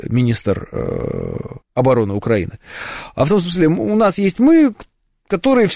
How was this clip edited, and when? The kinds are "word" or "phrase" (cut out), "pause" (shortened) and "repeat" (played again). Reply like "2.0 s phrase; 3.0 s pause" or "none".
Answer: 1.6 s pause